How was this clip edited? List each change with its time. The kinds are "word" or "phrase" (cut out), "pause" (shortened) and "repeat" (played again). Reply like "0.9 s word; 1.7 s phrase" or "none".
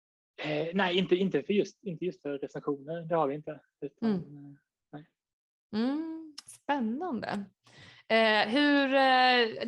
none